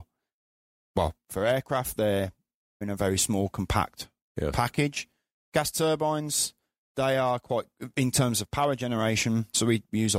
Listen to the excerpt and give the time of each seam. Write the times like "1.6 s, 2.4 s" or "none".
2.8 s